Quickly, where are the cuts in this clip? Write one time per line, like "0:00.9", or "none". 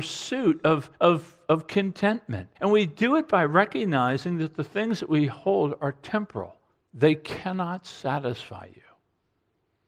0:00.9
0:02.5
0:06.7